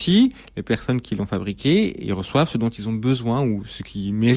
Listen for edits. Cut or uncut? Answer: uncut